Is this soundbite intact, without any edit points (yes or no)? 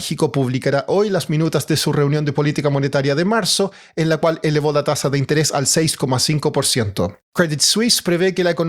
no